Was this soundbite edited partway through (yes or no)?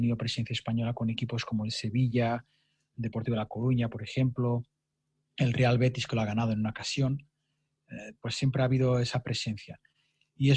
no